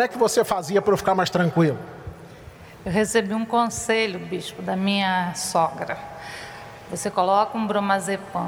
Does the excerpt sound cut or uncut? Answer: uncut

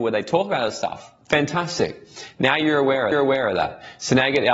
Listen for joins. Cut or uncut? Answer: cut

